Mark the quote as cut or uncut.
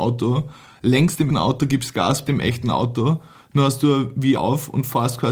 cut